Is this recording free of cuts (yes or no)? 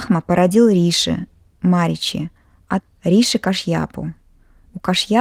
no